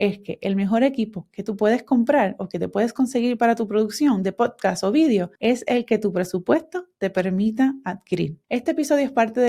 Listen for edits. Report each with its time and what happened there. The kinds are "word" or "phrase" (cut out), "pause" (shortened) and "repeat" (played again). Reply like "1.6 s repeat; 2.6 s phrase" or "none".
5.4 s pause